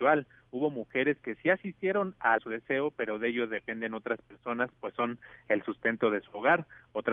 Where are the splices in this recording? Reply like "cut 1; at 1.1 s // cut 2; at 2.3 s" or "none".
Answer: cut 1; at 2.4 s

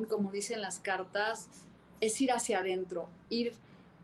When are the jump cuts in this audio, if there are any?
none

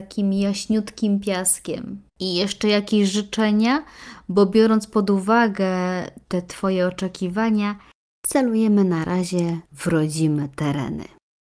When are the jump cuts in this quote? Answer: cut 1; at 2.1 s // cut 2; at 6.2 s

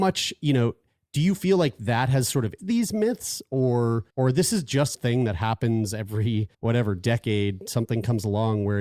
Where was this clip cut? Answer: cut 1; at 2.6 s // cut 2; at 4.1 s // cut 3; at 4.9 s // cut 4; at 6.5 s

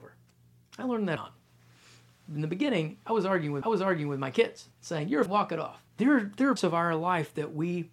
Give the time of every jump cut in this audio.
cut 1; at 1.2 s // cut 2; at 3.6 s // cut 3; at 4.7 s // cut 4; at 5.3 s // cut 5; at 5.9 s // cut 6; at 6.6 s

